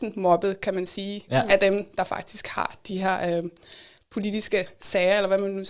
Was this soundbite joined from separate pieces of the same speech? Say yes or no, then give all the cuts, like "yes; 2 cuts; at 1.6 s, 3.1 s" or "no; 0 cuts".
no; 0 cuts